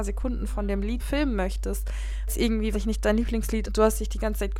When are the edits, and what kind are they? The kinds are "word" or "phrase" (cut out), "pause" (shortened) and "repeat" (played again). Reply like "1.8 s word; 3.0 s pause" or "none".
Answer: 1.0 s word; 2.3 s word; 2.7 s word; 3.7 s word